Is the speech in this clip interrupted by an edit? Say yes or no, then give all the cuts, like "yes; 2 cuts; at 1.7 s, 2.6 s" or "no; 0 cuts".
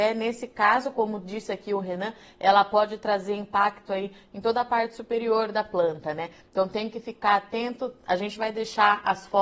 no; 0 cuts